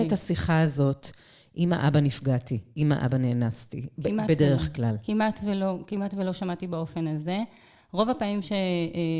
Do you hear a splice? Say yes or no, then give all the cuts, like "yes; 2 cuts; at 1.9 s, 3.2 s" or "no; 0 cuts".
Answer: no; 0 cuts